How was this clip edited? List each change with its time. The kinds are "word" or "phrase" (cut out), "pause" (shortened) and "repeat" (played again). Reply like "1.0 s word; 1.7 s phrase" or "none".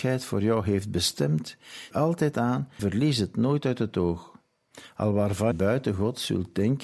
1.9 s phrase; 2.8 s word; 5.5 s word

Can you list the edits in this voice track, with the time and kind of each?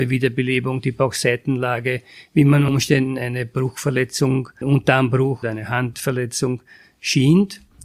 2.7 s word; 4.6 s word; 5.4 s word

